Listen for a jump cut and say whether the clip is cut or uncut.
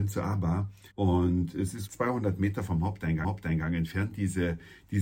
cut